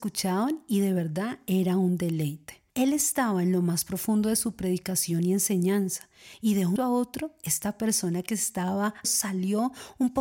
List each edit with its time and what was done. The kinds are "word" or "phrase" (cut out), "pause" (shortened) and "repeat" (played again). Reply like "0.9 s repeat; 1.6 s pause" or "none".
2.7 s pause; 6.8 s word; 9.0 s phrase